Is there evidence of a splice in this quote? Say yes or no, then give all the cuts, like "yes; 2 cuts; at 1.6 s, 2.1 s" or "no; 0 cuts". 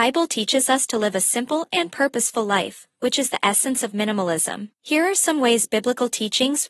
yes; 1 cut; at 4.7 s